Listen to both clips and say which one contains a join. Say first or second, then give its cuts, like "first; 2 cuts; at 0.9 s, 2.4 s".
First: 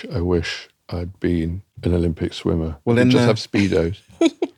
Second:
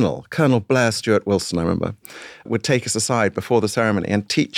first; 1 cut; at 2.8 s